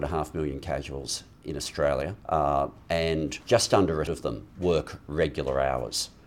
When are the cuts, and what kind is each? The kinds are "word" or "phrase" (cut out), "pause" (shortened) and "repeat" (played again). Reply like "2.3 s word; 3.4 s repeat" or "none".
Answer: 2.2 s pause; 3.4 s pause; 4.1 s word; 4.5 s pause

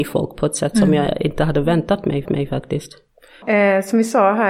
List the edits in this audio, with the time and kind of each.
2.3 s repeat

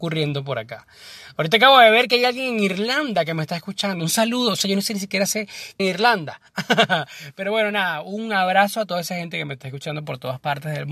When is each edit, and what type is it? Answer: 5.8 s phrase

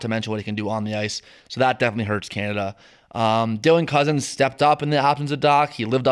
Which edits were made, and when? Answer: none

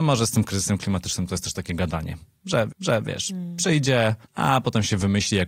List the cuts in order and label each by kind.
2.7 s repeat; 4.2 s pause

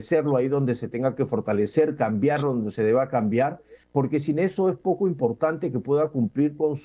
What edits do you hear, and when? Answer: 3.8 s pause

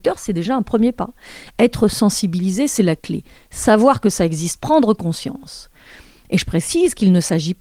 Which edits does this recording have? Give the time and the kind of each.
none

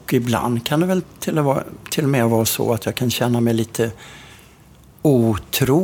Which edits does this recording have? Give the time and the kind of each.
none

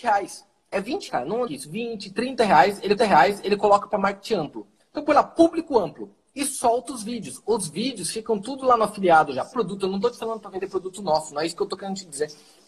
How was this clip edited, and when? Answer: 1.1 s word; 1.5 s phrase; 3.0 s repeat; 4.8 s pause; 9.5 s word

